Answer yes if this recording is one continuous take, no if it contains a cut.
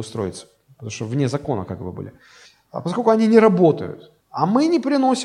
no